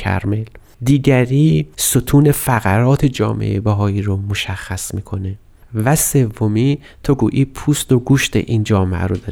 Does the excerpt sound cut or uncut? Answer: uncut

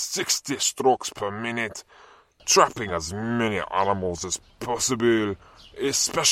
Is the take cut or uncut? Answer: uncut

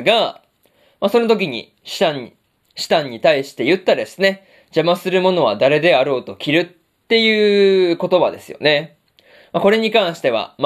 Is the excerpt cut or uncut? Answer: uncut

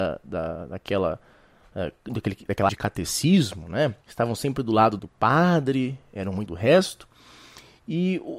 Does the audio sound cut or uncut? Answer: cut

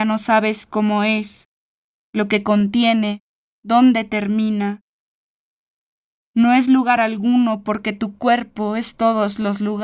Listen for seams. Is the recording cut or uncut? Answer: uncut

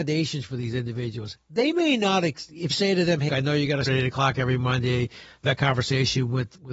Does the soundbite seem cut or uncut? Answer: cut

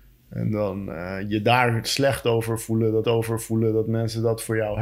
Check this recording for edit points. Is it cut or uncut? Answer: cut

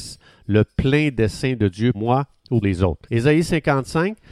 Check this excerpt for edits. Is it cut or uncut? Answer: cut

